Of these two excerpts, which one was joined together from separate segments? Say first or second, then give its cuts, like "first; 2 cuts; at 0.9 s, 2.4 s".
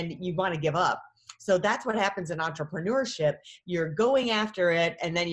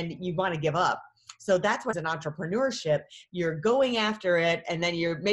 second; 1 cut; at 1.9 s